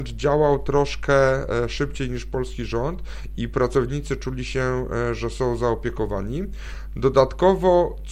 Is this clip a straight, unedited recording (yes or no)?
yes